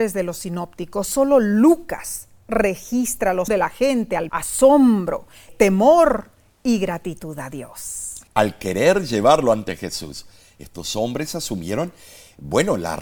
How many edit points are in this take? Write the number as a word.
four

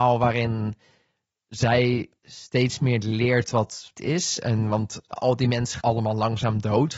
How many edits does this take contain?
four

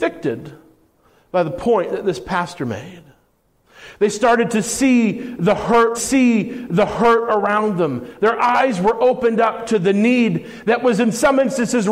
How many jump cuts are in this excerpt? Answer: one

